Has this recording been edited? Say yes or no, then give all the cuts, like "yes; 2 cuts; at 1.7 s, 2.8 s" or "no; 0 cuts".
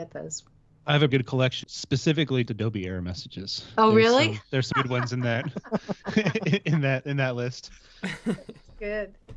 yes; 4 cuts; at 1.1 s, 1.6 s, 2.5 s, 4.7 s